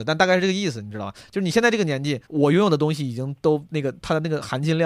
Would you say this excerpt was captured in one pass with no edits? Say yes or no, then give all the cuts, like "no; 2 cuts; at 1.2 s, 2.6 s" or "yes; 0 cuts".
no; 1 cut; at 2.2 s